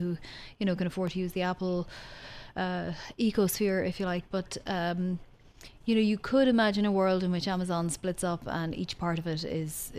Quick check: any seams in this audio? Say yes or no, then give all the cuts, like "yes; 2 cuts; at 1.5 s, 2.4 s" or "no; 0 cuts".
no; 0 cuts